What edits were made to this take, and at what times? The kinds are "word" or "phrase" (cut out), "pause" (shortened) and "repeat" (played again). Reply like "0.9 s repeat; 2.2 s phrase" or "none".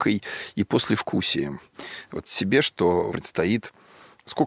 2.3 s word; 3.1 s word